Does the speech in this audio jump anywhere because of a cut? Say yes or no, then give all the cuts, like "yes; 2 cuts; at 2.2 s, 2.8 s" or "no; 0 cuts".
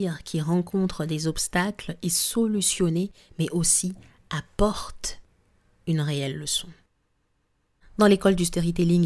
no; 0 cuts